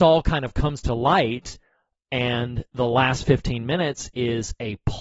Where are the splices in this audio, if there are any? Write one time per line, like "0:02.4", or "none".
none